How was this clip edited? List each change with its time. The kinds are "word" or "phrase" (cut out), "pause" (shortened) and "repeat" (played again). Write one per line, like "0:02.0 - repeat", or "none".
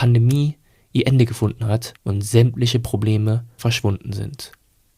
0:02.0 - pause
0:03.6 - word